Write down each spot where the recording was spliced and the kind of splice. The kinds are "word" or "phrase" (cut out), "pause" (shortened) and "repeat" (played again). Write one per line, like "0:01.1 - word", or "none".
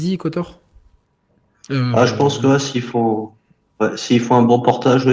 none